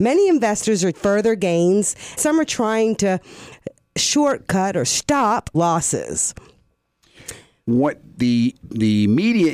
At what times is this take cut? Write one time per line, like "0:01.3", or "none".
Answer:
0:00.9
0:02.2
0:05.5
0:08.6

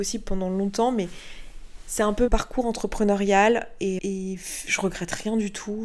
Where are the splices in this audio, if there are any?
0:02.3
0:04.0

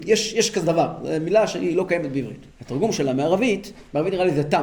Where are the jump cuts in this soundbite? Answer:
0:02.5

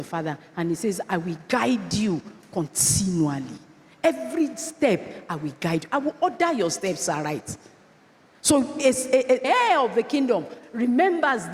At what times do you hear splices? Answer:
0:09.4

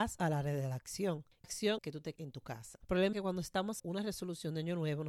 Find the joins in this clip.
0:01.4
0:01.8
0:02.2
0:03.1
0:03.8

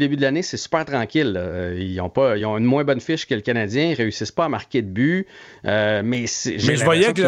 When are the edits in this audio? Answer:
none

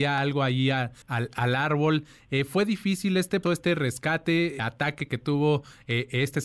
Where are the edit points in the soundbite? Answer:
0:01.0
0:03.4
0:04.6

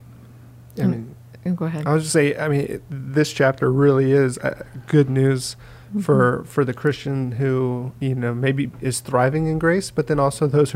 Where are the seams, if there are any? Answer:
0:07.9

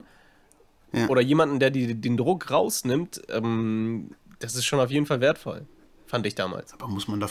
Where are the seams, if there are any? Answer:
none

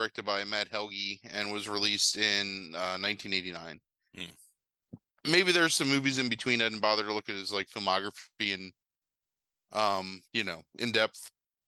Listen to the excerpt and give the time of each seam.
0:10.2

